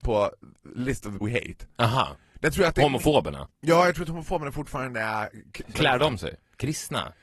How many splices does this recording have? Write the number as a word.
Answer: three